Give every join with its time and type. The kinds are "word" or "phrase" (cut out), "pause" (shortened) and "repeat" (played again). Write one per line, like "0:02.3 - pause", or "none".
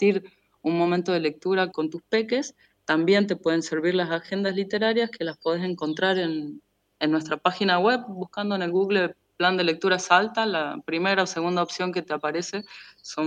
0:01.7 - word